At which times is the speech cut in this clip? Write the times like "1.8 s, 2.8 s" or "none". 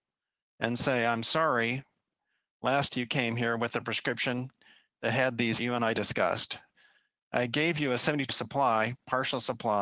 2.9 s, 5.6 s, 8.3 s